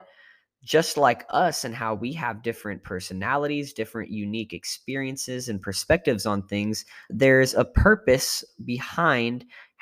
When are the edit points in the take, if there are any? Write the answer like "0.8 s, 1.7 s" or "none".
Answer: 7.1 s